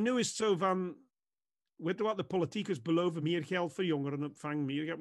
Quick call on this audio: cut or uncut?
uncut